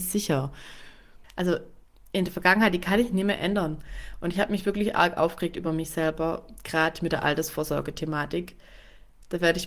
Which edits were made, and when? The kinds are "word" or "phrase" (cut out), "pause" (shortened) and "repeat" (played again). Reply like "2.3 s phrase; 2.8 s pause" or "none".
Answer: none